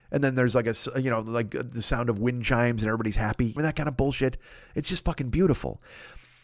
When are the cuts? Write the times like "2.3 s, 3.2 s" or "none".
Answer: 3.6 s